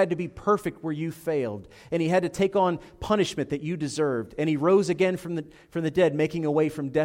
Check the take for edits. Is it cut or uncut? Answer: uncut